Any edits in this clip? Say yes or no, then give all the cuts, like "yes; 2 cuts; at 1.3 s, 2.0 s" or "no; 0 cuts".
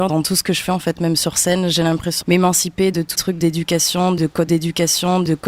yes; 3 cuts; at 2.2 s, 3.1 s, 4.5 s